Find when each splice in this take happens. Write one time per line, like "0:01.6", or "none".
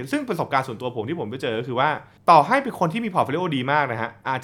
0:02.2